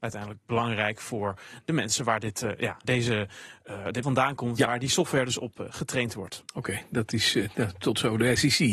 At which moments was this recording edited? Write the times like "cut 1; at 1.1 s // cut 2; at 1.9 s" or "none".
cut 1; at 2.8 s // cut 2; at 4.0 s